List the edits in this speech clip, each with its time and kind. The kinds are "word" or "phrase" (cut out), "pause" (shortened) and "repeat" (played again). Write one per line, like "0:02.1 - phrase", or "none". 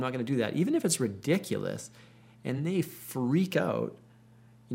none